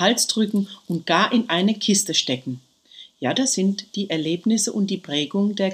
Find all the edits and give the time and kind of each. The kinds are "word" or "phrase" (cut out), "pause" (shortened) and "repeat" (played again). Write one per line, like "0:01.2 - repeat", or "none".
none